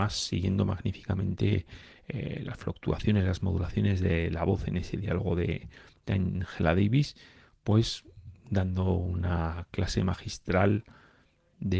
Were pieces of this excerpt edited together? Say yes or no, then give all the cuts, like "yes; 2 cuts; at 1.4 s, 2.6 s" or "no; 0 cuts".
no; 0 cuts